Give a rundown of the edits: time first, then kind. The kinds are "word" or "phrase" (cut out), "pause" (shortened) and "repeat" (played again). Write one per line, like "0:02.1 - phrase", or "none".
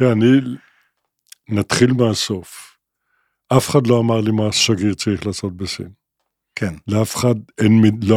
none